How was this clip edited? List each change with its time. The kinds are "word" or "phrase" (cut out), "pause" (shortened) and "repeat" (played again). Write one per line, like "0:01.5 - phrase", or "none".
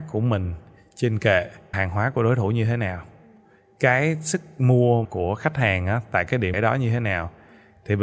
0:01.7 - word
0:05.0 - word
0:06.5 - word